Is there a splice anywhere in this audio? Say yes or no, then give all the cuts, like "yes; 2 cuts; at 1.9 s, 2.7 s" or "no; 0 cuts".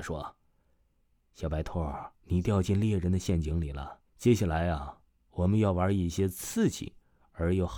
yes; 2 cuts; at 2.1 s, 4.1 s